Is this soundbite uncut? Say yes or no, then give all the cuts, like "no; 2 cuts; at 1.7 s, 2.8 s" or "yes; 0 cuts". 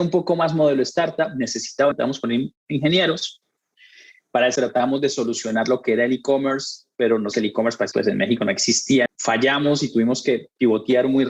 no; 5 cuts; at 1.9 s, 4.6 s, 7.3 s, 7.9 s, 9.1 s